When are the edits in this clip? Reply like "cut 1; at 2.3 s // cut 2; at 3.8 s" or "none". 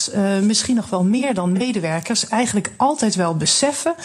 none

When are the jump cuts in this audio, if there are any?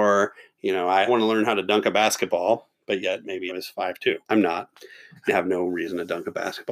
cut 1; at 1.1 s // cut 2; at 3.5 s // cut 3; at 4.2 s // cut 4; at 5.3 s

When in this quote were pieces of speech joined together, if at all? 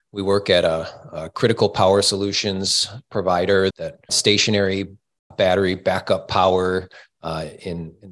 cut 1; at 3.7 s // cut 2; at 4.1 s // cut 3; at 5.3 s

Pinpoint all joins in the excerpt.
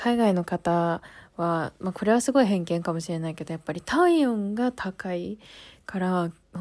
none

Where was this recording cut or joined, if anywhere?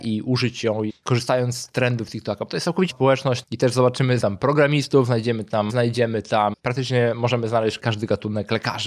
cut 1; at 2.9 s // cut 2; at 3.4 s // cut 3; at 4.2 s // cut 4; at 5.7 s // cut 5; at 6.5 s

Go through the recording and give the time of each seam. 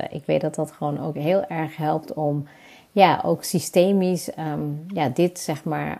none

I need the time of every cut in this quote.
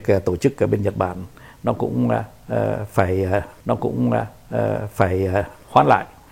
cut 1; at 3.6 s

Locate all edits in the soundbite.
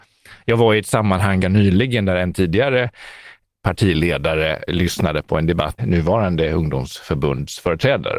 cut 1; at 1.4 s // cut 2; at 3.5 s // cut 3; at 4.7 s // cut 4; at 5.8 s

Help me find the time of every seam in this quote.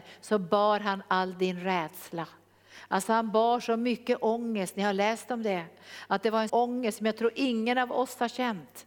cut 1; at 6.5 s

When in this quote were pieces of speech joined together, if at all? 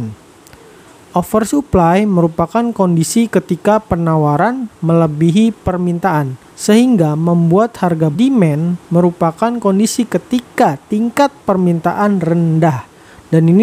cut 1; at 6.5 s // cut 2; at 8.1 s

